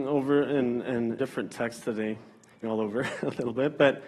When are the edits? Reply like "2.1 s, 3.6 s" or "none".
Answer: 1.2 s, 2.6 s